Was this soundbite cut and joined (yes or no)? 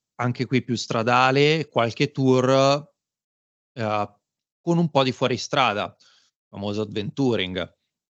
no